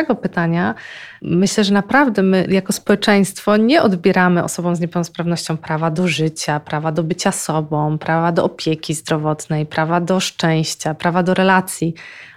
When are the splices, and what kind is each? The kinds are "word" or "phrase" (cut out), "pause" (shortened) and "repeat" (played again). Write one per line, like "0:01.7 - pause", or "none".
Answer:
none